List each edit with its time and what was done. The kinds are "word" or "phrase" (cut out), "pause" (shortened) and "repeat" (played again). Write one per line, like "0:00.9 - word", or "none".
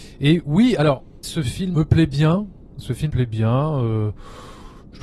0:01.2 - word
0:01.7 - word
0:03.1 - word